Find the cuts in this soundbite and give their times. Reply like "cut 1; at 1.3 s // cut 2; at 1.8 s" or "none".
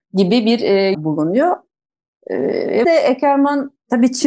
cut 1; at 0.9 s // cut 2; at 2.8 s